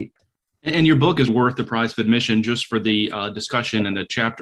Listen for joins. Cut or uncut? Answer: cut